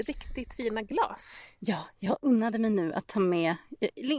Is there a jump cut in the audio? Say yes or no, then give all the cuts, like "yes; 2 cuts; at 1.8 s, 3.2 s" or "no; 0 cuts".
no; 0 cuts